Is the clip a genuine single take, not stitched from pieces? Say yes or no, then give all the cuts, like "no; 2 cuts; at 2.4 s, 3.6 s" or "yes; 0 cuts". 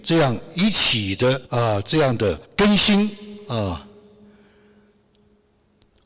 no; 2 cuts; at 1.4 s, 2.4 s